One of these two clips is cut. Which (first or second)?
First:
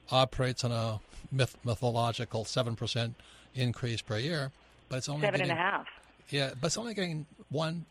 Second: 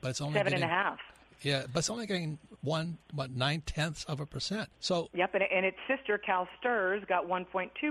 second